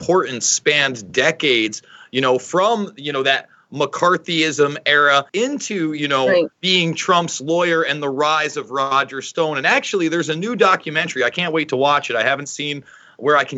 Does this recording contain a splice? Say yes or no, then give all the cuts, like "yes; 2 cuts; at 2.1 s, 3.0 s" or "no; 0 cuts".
yes; 2 cuts; at 5.3 s, 6.5 s